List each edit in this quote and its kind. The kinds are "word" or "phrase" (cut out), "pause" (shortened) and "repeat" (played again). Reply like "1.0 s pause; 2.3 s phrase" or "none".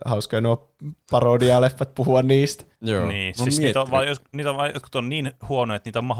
2.7 s pause